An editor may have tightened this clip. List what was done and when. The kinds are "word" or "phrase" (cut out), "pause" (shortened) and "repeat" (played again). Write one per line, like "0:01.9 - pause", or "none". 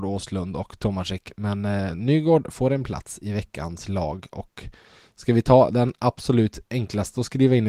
none